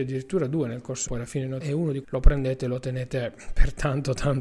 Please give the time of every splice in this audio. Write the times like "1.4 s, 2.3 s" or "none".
1.1 s, 1.6 s, 2.0 s